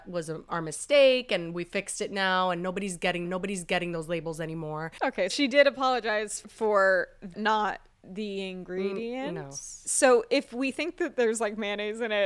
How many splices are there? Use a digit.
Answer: 4